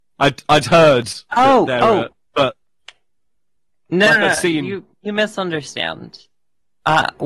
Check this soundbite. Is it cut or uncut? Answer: uncut